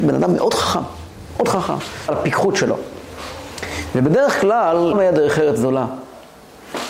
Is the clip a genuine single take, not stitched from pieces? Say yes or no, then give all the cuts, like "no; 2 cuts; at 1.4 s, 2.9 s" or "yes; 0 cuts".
no; 2 cuts; at 2.1 s, 4.9 s